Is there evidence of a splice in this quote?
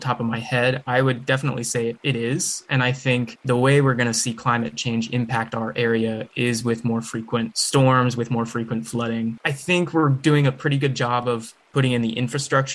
no; 0 cuts

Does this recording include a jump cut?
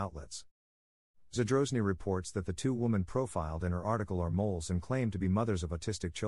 no; 0 cuts

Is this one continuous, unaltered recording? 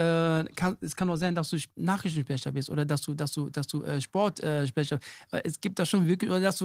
no; 1 cut; at 1.7 s

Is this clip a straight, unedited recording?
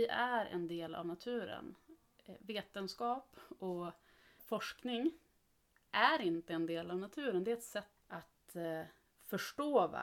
no; 2 cuts; at 4.4 s, 8.0 s

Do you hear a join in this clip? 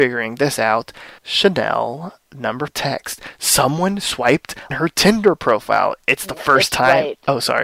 yes; 3 cuts; at 1.2 s, 2.7 s, 4.7 s

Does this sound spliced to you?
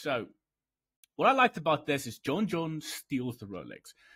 no; 0 cuts

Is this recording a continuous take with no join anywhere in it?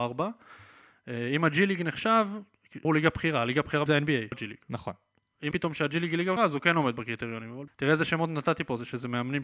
no; 6 cuts; at 2.8 s, 3.9 s, 4.3 s, 5.5 s, 6.4 s, 7.7 s

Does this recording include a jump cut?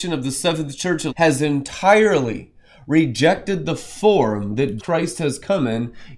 yes; 2 cuts; at 1.1 s, 4.8 s

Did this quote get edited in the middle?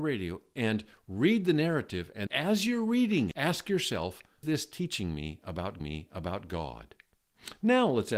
yes; 4 cuts; at 2.3 s, 3.3 s, 4.4 s, 5.8 s

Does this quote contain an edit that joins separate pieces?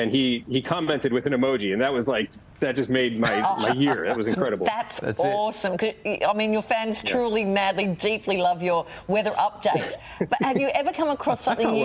no; 0 cuts

